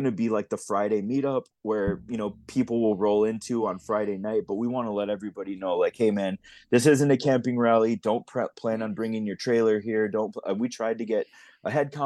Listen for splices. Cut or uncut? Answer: uncut